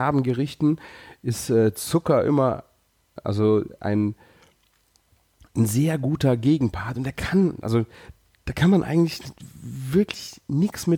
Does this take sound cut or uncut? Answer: uncut